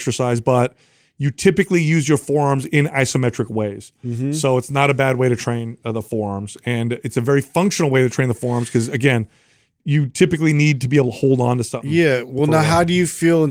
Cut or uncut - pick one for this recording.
uncut